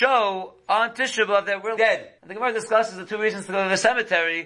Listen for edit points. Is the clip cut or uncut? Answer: cut